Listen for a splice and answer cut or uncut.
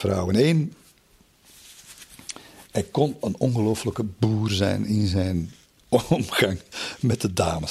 uncut